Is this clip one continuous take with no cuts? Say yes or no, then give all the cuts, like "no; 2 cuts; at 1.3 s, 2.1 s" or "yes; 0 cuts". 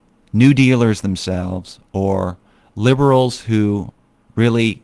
yes; 0 cuts